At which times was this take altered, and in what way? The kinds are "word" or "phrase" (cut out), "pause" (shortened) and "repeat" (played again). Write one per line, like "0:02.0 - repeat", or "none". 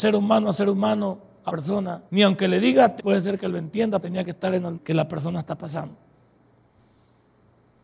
0:01.5 - word
0:02.1 - pause
0:03.0 - phrase
0:04.0 - word
0:04.7 - word